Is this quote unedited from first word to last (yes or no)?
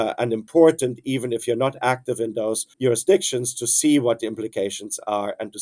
no